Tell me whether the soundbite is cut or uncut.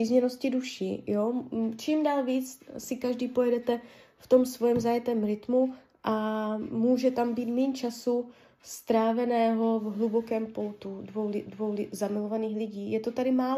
cut